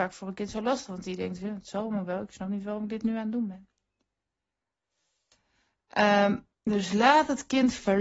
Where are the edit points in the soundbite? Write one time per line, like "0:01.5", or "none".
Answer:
0:06.5